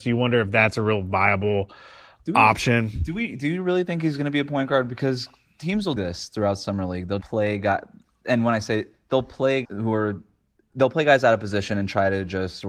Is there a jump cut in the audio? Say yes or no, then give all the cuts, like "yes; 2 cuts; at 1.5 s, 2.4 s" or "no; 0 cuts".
yes; 3 cuts; at 6.0 s, 7.2 s, 9.6 s